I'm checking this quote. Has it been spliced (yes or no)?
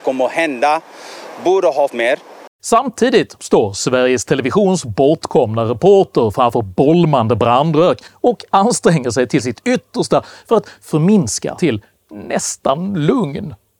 yes